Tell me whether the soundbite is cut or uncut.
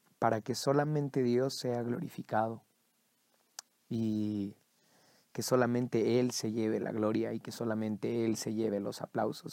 uncut